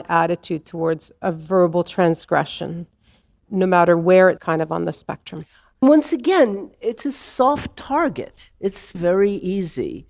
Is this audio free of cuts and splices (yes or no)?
no